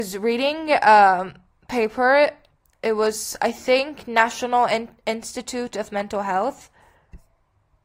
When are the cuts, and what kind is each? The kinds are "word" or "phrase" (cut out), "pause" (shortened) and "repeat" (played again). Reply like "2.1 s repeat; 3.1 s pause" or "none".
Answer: none